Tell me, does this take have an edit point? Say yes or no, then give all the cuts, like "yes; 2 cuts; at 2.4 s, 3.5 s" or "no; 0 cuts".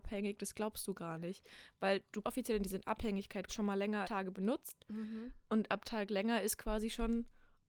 yes; 4 cuts; at 2.2 s, 3.5 s, 4.0 s, 5.8 s